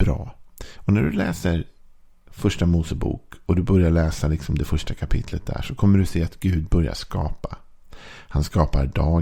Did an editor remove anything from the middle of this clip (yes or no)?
no